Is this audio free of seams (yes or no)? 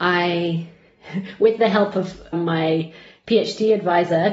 no